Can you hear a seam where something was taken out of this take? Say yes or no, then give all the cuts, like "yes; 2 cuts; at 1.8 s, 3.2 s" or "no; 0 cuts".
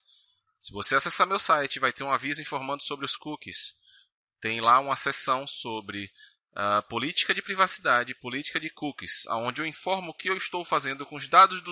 no; 0 cuts